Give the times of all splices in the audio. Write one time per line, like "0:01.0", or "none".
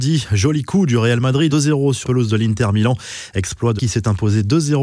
0:01.5
0:02.0
0:03.8